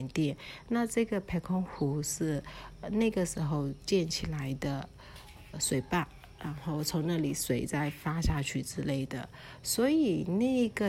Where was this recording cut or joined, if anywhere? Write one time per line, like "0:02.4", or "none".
0:05.5